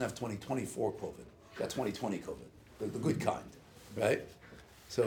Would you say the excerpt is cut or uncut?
uncut